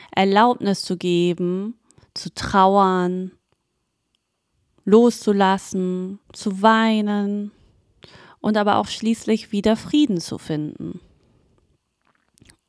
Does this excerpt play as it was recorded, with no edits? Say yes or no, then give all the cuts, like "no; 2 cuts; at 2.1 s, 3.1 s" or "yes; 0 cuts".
no; 2 cuts; at 6.2 s, 8.0 s